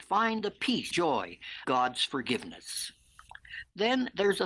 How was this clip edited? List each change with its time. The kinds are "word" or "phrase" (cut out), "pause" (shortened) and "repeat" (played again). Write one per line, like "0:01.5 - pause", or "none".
0:00.9 - word
0:01.6 - word

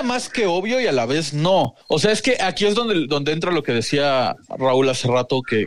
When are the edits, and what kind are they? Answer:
0:01.8 - pause

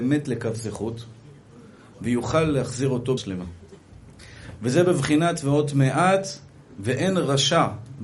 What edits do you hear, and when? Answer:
0:03.2 - word

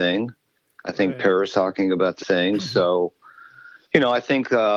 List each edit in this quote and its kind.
0:01.5 - word
0:02.2 - word
0:03.8 - pause

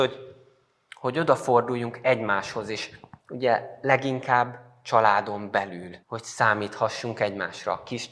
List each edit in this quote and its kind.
0:03.2 - pause
0:06.0 - pause

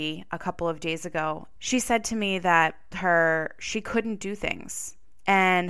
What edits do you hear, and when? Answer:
0:01.6 - word
0:02.9 - phrase

